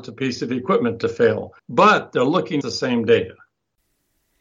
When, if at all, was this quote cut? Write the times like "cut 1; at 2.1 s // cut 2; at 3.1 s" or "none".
cut 1; at 1.6 s // cut 2; at 2.6 s